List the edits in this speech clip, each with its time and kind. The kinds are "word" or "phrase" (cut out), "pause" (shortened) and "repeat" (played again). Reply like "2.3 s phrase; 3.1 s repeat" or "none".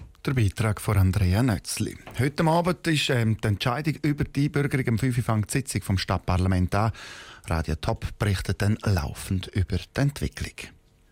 none